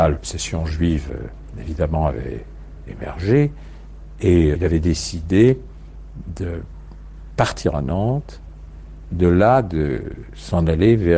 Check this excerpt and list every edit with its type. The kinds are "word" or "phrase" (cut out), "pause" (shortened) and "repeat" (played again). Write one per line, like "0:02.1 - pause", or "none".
0:04.5 - word
0:09.1 - word